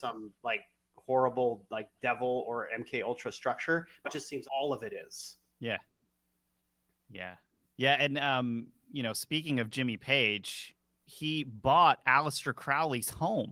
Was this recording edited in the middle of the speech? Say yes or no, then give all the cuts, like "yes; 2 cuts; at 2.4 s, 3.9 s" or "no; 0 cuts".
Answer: yes; 2 cuts; at 4.0 s, 4.4 s